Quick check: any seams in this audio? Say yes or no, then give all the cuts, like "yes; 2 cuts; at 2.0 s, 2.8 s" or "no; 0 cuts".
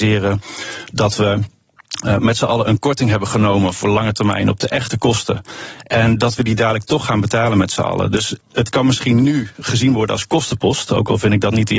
no; 0 cuts